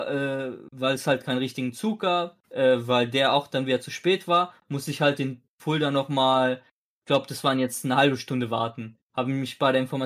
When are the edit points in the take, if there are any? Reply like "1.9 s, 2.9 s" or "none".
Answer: 2.4 s